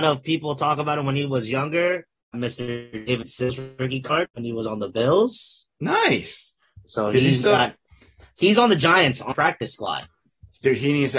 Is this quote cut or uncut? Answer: cut